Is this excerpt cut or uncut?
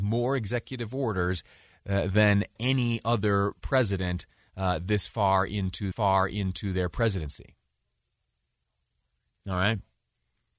cut